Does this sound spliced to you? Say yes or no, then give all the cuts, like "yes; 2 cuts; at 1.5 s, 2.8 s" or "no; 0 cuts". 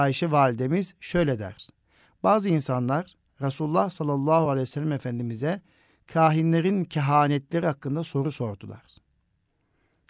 no; 0 cuts